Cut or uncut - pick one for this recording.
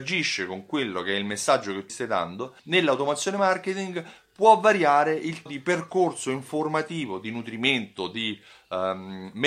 cut